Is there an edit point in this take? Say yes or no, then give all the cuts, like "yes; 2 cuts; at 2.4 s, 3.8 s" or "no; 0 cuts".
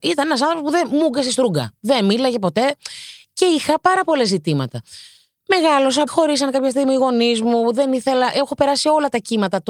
yes; 1 cut; at 6.1 s